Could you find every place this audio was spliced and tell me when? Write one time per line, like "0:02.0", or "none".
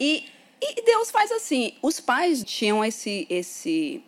0:02.4

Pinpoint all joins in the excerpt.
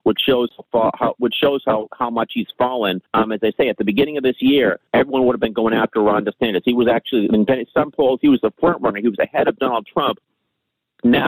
0:03.1
0:04.9

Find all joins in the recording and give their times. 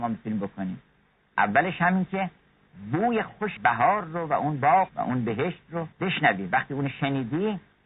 0:03.6
0:04.9
0:05.9

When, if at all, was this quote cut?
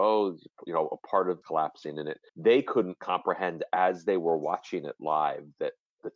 0:01.4
0:02.3

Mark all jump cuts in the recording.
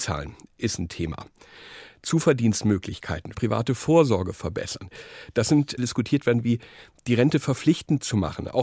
0:03.3
0:05.8

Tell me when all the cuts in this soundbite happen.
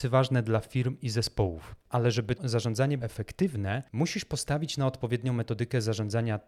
0:02.4
0:03.0

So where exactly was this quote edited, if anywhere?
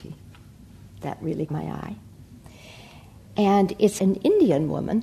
0:00.9
0:01.5
0:04.0

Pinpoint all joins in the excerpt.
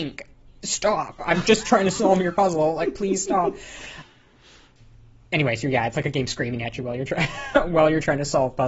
none

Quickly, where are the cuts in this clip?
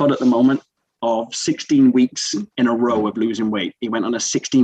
0:02.5

